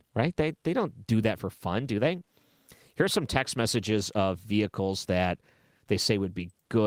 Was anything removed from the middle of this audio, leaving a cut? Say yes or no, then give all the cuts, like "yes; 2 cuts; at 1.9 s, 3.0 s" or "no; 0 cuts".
no; 0 cuts